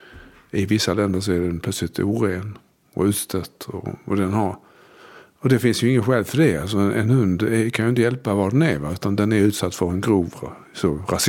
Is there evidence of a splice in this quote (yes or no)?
no